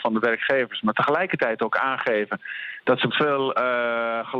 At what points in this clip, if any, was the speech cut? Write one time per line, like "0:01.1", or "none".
0:03.1